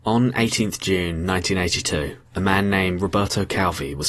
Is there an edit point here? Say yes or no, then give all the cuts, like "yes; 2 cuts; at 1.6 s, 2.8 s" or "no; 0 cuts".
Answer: yes; 1 cut; at 2.3 s